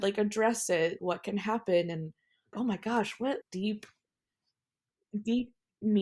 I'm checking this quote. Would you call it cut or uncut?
cut